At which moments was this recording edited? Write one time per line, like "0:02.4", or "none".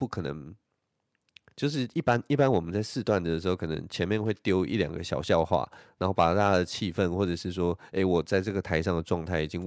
none